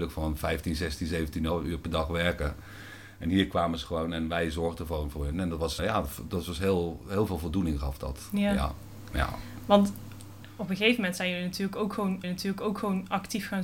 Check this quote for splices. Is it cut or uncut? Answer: cut